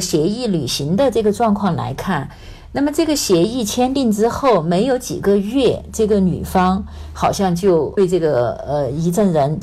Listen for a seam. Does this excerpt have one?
no; 0 cuts

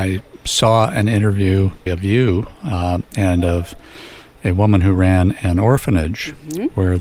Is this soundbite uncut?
no; 1 cut; at 1.9 s

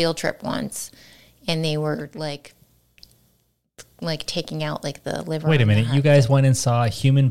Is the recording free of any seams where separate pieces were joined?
yes; 0 cuts

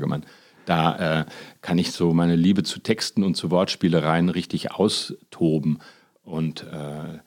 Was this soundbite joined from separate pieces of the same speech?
no; 0 cuts

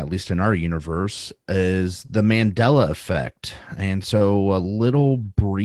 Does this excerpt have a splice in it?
no; 0 cuts

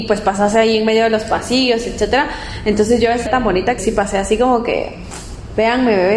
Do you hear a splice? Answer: yes; 2 cuts; at 3.3 s, 3.8 s

